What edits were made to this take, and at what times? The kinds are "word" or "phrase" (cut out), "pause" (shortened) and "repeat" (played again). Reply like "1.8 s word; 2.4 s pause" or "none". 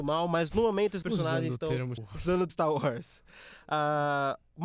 1.0 s word; 2.0 s word; 2.5 s word